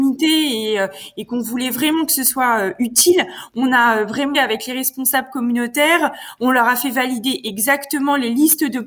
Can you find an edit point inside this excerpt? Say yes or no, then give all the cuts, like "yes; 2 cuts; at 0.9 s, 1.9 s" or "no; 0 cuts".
yes; 1 cut; at 4.3 s